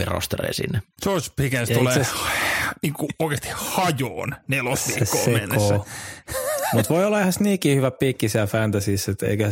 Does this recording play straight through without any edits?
yes; 0 cuts

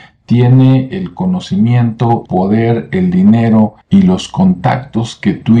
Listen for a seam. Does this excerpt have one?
yes; 2 cuts; at 2.3 s, 3.8 s

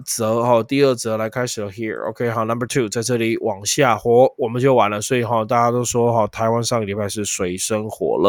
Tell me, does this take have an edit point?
no; 0 cuts

